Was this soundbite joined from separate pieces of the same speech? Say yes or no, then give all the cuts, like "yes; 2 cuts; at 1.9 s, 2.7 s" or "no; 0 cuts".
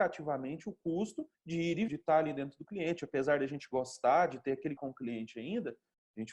yes; 3 cuts; at 1.3 s, 1.9 s, 4.8 s